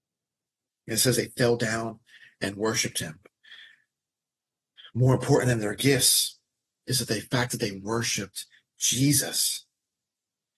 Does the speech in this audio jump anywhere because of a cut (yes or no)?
no